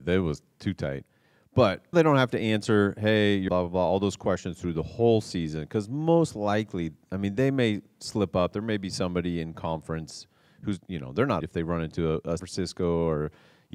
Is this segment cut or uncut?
cut